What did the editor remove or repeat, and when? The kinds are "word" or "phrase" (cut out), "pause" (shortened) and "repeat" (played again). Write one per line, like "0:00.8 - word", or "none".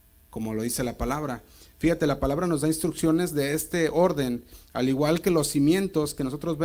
none